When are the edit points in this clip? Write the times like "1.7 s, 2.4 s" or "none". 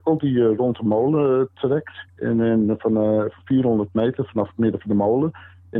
2.1 s